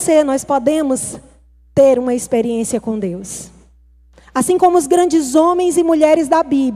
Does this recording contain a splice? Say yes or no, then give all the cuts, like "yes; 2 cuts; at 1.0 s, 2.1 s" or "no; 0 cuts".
no; 0 cuts